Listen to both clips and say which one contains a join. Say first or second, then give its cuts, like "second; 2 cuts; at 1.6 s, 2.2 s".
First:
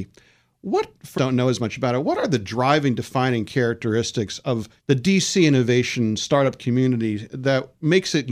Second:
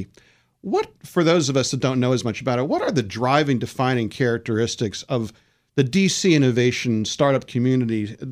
first; 2 cuts; at 1.2 s, 4.8 s